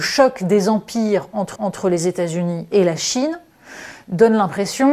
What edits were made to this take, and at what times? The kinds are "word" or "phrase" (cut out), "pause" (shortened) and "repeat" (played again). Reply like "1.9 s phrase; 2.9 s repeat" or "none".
1.6 s repeat